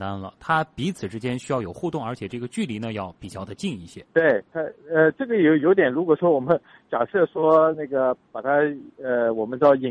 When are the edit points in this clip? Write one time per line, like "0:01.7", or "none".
0:04.1
0:08.2